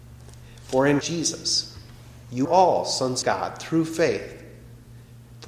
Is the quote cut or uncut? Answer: cut